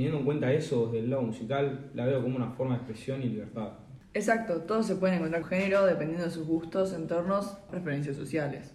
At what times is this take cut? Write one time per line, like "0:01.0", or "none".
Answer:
0:05.4
0:07.7